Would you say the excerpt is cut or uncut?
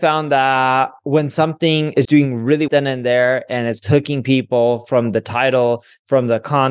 cut